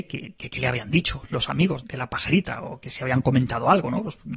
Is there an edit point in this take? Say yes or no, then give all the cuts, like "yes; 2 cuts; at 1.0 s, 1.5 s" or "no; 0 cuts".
yes; 1 cut; at 1.8 s